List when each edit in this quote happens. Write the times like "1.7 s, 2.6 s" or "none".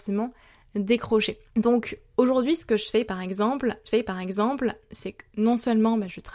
1.4 s, 3.9 s

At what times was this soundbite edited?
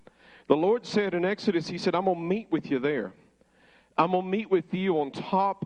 none

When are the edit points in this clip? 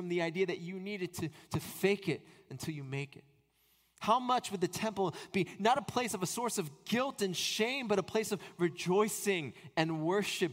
none

